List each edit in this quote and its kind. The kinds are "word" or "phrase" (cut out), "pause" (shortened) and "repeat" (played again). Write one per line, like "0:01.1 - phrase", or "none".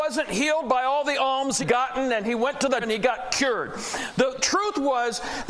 0:01.6 - word
0:02.8 - word
0:04.4 - word